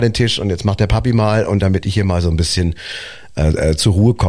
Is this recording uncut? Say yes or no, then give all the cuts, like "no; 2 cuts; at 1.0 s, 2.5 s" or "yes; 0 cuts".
yes; 0 cuts